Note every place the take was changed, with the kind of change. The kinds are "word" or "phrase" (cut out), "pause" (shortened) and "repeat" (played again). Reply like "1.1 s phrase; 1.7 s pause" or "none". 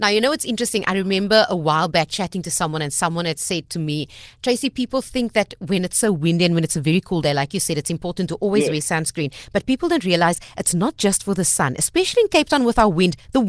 none

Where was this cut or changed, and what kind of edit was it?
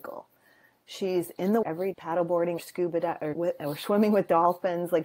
1.6 s word; 1.9 s word; 2.6 s word; 3.3 s word

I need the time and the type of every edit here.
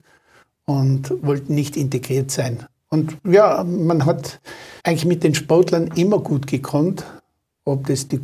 4.8 s pause

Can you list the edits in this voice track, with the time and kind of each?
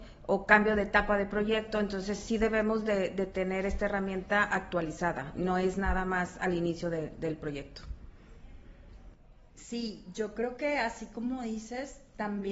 9.5 s pause

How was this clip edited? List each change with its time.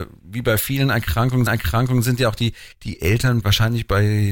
1.5 s repeat; 2.7 s pause; 3.4 s word

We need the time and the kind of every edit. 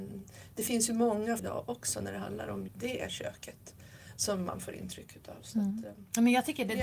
1.4 s word; 2.7 s word

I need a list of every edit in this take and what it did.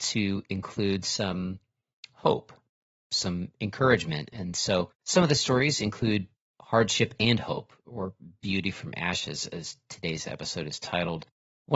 5.0 s pause

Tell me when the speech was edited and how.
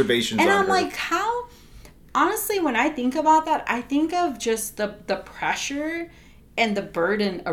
none

